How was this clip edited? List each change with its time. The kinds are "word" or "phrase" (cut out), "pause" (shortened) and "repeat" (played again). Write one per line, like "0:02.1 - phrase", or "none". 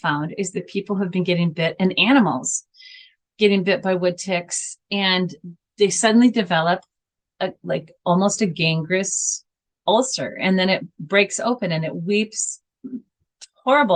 none